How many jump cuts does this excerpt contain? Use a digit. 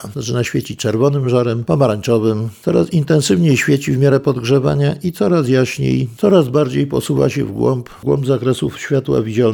0